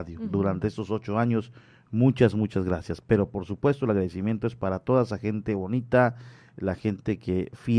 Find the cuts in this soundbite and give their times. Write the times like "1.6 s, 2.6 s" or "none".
none